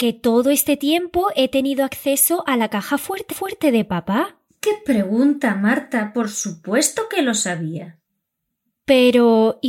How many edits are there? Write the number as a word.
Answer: one